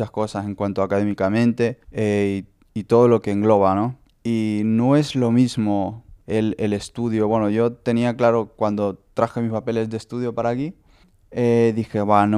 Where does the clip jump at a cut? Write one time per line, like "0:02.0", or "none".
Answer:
0:01.8
0:04.1
0:06.2
0:11.0

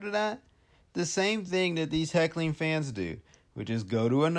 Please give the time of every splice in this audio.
none

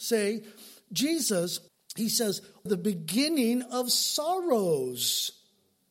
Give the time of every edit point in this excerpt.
0:01.7
0:02.7

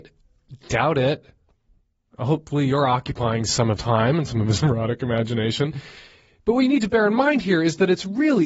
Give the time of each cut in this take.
0:03.8

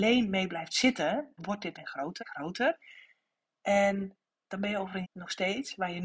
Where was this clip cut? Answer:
0:01.4
0:01.7
0:02.2
0:05.0

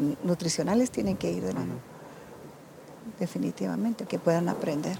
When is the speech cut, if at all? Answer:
0:01.5
0:04.1

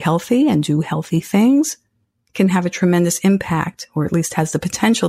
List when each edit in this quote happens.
none

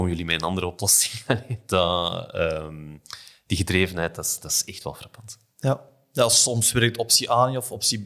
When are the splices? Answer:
none

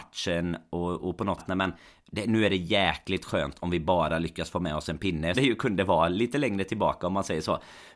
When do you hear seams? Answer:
0:01.4
0:05.3

